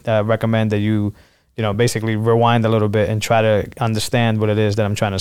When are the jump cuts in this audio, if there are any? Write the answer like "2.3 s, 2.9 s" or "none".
none